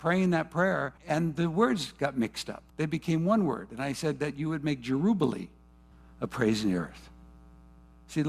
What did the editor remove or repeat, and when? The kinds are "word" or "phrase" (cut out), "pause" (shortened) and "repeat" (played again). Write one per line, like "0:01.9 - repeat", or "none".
0:01.0 - pause
0:02.7 - pause
0:05.9 - pause